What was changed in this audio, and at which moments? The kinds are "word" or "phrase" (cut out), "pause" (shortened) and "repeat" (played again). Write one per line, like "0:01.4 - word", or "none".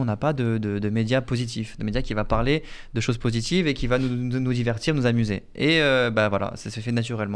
none